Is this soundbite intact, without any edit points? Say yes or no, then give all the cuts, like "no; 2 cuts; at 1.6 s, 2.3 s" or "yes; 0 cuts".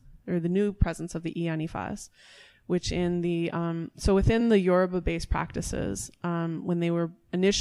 yes; 0 cuts